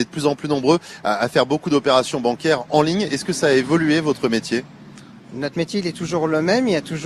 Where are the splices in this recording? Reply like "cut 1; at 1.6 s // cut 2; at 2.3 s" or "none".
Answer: none